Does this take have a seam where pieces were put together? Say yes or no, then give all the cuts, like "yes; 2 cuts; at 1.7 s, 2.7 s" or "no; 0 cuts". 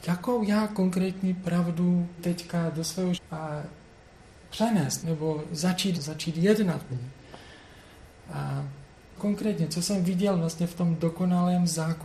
yes; 6 cuts; at 2.2 s, 3.1 s, 5.0 s, 5.9 s, 6.9 s, 9.2 s